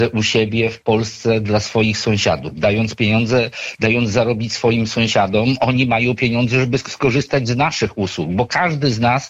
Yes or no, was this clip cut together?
no